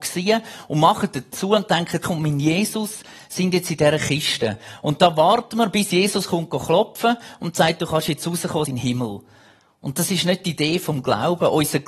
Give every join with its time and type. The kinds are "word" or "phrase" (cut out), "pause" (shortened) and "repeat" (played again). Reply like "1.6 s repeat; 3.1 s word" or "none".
1.3 s word; 2.0 s word; 8.6 s phrase